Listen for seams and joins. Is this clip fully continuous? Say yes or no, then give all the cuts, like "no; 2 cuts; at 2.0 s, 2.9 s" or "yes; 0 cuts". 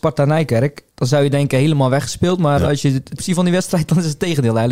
no; 2 cuts; at 0.9 s, 3.2 s